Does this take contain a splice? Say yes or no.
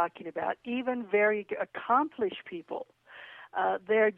no